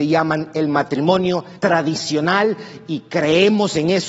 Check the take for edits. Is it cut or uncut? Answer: cut